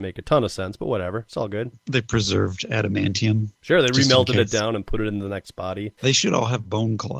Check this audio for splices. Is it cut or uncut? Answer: cut